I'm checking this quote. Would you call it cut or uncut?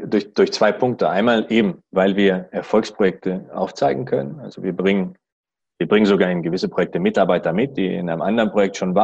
uncut